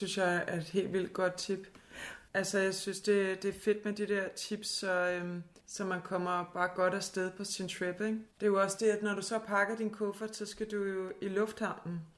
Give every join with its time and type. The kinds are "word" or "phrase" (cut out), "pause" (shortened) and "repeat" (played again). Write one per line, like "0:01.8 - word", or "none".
0:02.3 - pause
0:05.6 - pause
0:08.3 - pause